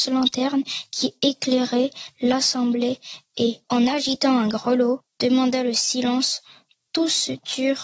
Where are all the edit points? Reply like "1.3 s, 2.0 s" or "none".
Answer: none